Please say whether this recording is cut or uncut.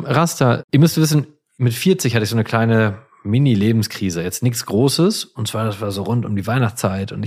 uncut